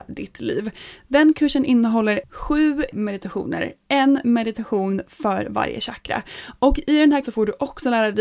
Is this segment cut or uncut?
cut